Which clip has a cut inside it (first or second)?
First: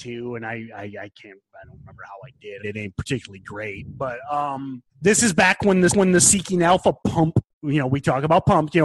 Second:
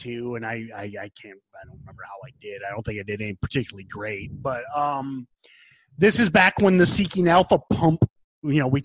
first